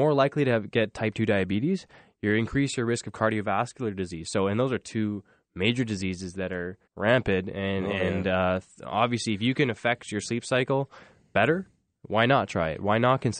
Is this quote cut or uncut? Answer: cut